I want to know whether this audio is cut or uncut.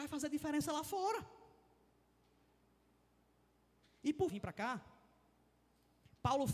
cut